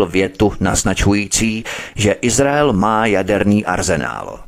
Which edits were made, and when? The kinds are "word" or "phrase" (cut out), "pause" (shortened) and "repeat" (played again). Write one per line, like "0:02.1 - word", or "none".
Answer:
none

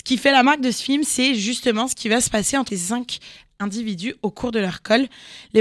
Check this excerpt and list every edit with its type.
0:02.7 - word

